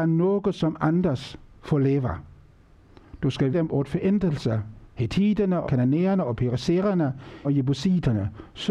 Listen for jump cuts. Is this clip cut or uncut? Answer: cut